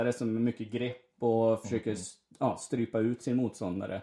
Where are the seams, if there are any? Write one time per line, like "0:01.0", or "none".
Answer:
none